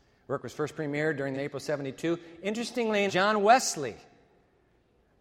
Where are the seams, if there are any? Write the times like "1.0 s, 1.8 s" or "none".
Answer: 1.3 s, 3.1 s